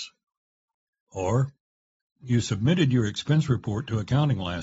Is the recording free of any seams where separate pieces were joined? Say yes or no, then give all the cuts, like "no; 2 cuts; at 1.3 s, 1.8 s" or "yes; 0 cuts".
no; 1 cut; at 2.2 s